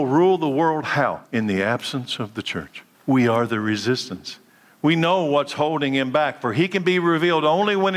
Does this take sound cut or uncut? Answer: cut